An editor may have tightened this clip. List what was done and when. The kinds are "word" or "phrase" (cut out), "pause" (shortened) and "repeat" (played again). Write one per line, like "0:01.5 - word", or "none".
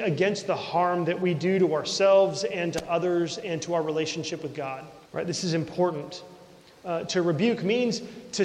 0:05.1 - pause